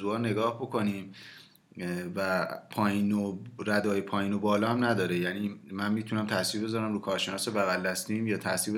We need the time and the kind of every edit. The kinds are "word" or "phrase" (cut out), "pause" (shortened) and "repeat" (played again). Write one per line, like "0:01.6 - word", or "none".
0:05.6 - pause